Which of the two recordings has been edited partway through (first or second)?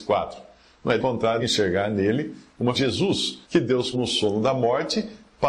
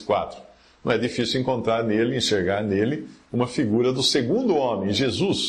first